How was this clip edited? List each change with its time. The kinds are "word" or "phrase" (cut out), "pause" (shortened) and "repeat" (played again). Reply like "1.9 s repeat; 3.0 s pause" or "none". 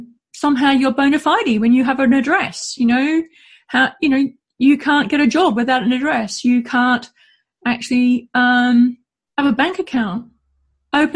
none